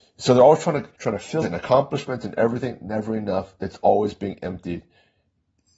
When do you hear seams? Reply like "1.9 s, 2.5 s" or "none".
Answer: 0.9 s, 1.4 s